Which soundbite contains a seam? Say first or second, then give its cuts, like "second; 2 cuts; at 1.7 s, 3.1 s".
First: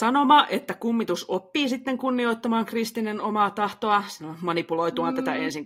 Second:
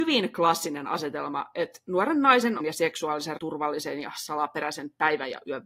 second; 2 cuts; at 2.6 s, 3.4 s